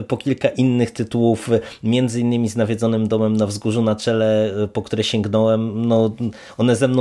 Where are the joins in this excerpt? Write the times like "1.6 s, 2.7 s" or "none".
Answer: none